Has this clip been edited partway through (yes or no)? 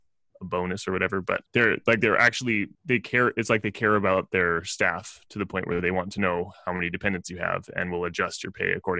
yes